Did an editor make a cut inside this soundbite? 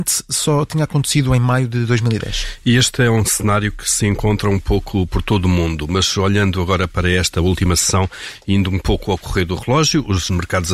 no; 0 cuts

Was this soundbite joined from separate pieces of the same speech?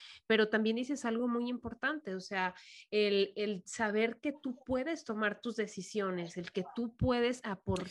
no; 0 cuts

